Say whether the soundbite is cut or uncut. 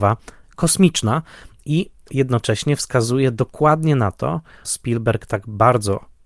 cut